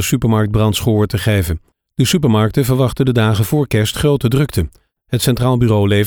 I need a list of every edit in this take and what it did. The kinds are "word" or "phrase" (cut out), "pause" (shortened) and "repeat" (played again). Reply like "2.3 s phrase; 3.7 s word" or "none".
none